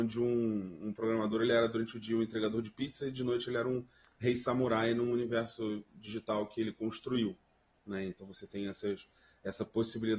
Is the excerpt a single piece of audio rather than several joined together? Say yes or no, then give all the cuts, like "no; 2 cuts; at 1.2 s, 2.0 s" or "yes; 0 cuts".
yes; 0 cuts